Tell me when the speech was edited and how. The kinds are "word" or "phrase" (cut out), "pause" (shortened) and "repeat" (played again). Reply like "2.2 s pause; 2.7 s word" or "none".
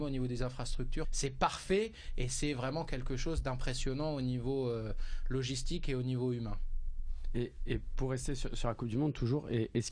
1.0 s word

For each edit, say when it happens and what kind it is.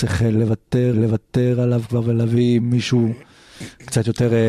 0.9 s repeat

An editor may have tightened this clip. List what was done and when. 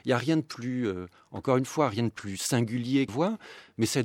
3.1 s word

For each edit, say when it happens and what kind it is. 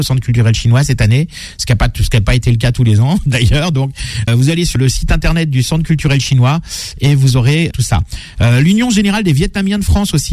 4.3 s word; 4.8 s word; 7.7 s word

